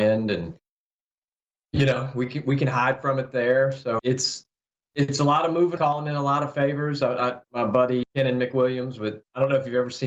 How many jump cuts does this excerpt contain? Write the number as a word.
three